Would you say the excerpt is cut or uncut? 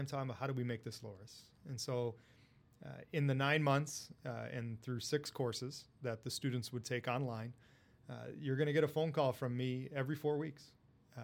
uncut